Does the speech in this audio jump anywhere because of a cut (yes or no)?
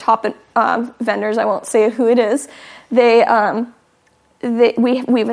no